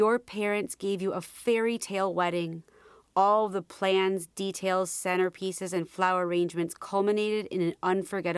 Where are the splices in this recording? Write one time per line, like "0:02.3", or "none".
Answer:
none